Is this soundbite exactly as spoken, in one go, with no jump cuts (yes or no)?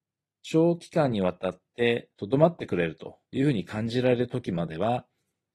no